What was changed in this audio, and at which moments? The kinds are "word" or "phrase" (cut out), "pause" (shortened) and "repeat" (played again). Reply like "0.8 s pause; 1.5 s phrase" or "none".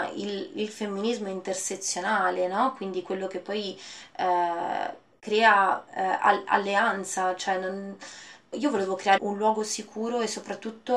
5.1 s pause; 8.5 s word; 9.2 s word